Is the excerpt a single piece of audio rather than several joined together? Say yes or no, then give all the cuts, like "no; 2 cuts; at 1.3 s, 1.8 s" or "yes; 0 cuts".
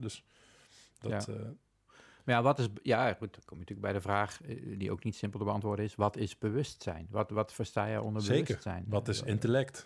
yes; 0 cuts